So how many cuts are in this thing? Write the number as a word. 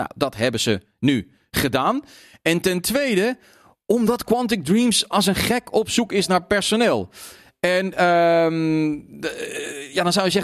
zero